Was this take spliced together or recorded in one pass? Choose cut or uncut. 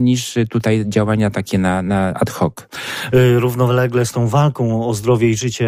uncut